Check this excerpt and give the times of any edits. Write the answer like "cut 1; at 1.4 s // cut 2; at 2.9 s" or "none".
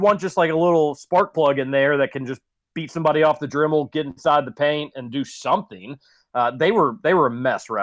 none

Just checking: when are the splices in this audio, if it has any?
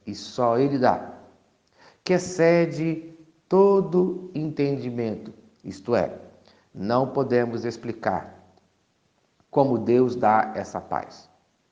none

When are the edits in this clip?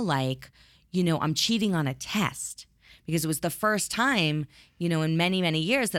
none

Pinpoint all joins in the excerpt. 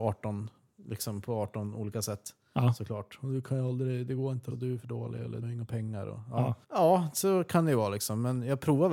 cut 1; at 4.5 s // cut 2; at 5.4 s // cut 3; at 6.6 s

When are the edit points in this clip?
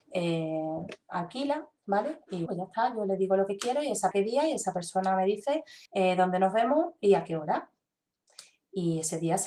cut 1; at 1.0 s // cut 2; at 2.5 s // cut 3; at 4.1 s // cut 4; at 5.9 s

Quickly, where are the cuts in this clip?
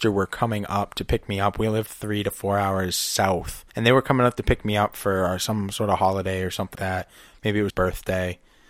cut 1; at 1.9 s // cut 2; at 3.7 s // cut 3; at 6.7 s // cut 4; at 7.7 s

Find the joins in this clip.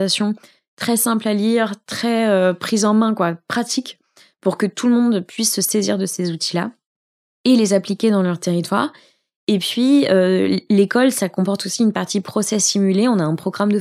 none

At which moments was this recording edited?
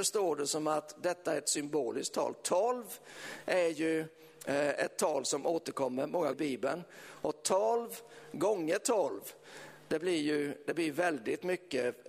cut 1; at 6.3 s

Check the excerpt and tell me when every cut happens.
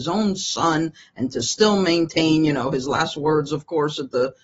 none

